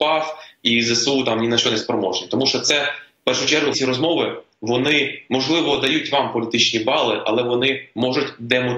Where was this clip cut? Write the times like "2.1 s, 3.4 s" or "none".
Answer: 3.7 s